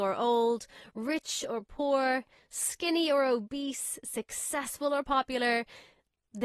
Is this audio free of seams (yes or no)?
yes